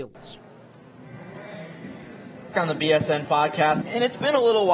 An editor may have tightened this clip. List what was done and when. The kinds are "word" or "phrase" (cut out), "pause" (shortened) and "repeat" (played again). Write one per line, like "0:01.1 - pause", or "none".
0:02.5 - word
0:03.2 - word
0:03.8 - word